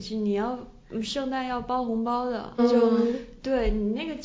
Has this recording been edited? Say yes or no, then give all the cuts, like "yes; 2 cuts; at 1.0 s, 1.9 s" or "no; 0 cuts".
yes; 1 cut; at 2.6 s